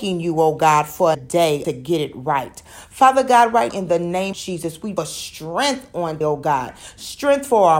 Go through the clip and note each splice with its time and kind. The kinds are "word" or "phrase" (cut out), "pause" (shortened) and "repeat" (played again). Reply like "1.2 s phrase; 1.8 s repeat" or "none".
1.1 s word; 1.6 s phrase; 3.7 s word; 4.3 s word; 5.0 s phrase; 6.2 s word